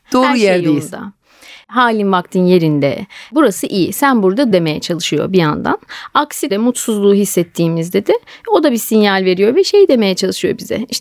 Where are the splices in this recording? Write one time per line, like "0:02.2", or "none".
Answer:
0:04.5
0:06.5